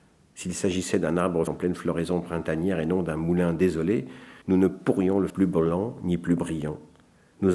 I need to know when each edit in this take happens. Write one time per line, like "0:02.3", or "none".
0:01.5
0:04.4
0:05.3